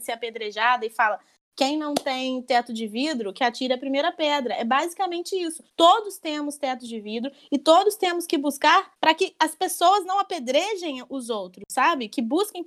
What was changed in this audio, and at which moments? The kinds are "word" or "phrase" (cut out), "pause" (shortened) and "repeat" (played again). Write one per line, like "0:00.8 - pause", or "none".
0:05.7 - pause
0:08.9 - pause

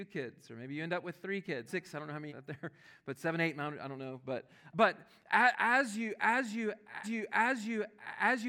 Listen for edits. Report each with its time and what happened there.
0:01.7 - phrase
0:02.3 - phrase
0:04.7 - word
0:07.0 - repeat

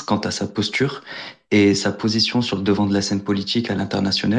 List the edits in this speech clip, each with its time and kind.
none

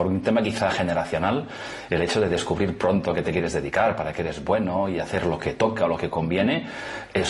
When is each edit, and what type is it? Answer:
none

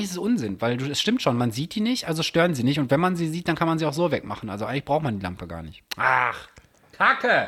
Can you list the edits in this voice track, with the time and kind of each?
0:05.9 - pause

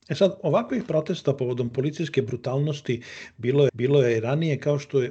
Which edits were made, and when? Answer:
0:03.7 - repeat

